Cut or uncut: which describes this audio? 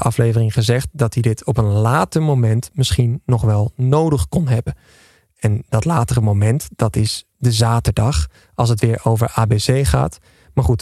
uncut